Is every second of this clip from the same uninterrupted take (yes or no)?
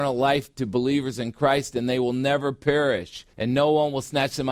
no